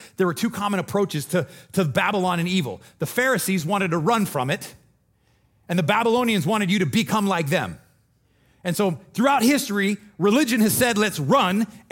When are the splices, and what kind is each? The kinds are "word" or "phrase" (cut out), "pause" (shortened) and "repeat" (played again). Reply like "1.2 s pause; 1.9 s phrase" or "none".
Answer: none